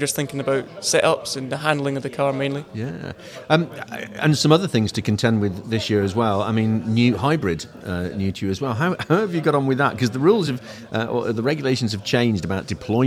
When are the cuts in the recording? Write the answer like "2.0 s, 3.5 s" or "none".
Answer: none